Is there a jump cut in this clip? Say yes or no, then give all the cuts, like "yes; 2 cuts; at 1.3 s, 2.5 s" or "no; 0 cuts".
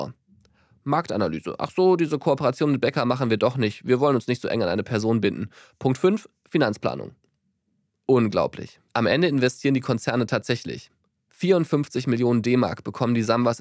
yes; 1 cut; at 8.9 s